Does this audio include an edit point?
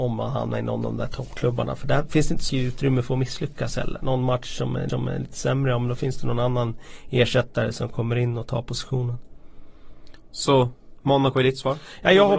yes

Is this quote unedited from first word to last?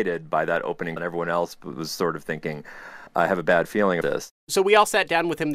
no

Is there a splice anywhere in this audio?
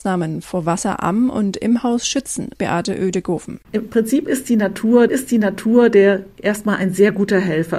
yes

